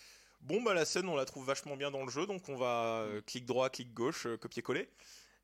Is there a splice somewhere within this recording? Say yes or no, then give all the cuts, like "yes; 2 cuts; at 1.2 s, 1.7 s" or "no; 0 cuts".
no; 0 cuts